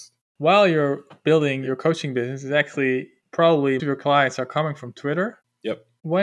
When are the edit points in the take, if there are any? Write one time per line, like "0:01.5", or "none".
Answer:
0:03.8